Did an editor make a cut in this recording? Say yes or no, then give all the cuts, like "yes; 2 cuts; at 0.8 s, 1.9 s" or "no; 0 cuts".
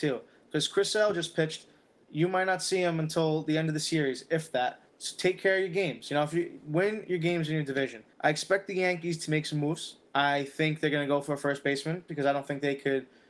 yes; 3 cuts; at 4.9 s, 8.1 s, 10.1 s